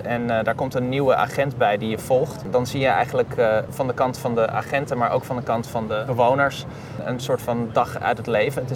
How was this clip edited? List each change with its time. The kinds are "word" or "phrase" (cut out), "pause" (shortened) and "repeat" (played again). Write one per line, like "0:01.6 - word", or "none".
none